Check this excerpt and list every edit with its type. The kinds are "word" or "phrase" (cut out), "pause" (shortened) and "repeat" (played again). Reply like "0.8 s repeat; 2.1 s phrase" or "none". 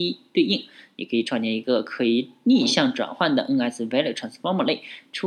none